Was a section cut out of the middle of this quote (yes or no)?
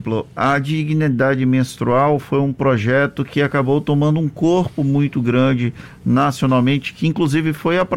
no